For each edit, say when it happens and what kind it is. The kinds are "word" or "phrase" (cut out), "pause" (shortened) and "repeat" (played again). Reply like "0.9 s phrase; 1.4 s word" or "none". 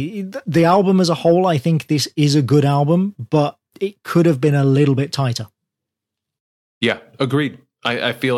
3.7 s pause